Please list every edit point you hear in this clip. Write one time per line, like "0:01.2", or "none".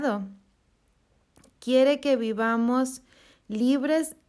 none